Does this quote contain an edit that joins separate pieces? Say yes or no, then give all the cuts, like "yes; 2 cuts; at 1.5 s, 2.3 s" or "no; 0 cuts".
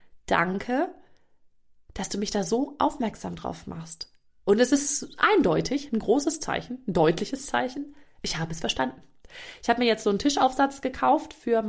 no; 0 cuts